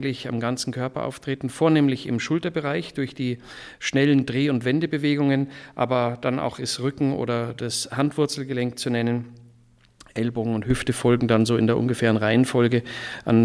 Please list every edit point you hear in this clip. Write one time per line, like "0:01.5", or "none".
none

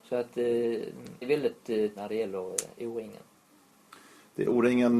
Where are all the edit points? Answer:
0:01.2
0:02.0

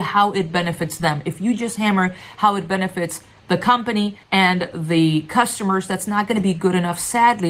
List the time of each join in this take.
0:04.2

